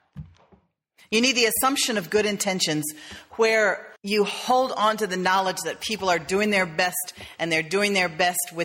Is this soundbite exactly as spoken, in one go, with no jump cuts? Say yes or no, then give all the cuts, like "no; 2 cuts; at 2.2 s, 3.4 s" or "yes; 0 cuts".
no; 1 cut; at 4.0 s